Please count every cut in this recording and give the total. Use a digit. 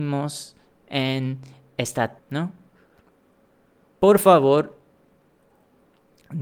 1